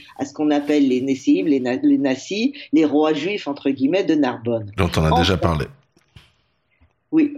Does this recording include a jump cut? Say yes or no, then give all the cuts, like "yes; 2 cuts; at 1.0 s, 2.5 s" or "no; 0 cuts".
no; 0 cuts